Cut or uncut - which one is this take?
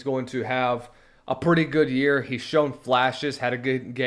uncut